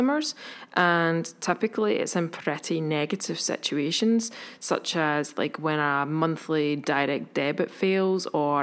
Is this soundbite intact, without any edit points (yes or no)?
yes